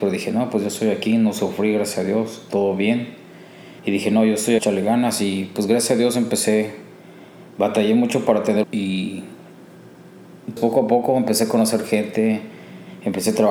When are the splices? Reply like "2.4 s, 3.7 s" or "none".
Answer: 3.8 s, 4.6 s, 8.6 s, 10.6 s